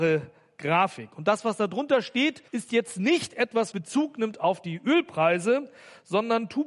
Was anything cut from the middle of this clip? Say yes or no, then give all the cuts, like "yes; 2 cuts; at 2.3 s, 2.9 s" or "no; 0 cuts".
yes; 2 cuts; at 2.5 s, 3.7 s